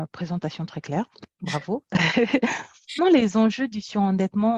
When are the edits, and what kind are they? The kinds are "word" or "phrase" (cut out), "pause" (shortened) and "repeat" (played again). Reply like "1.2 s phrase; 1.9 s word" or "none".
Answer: 3.0 s word